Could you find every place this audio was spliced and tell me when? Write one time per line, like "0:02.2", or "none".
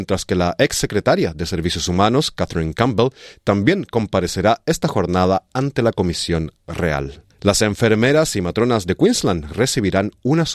0:07.3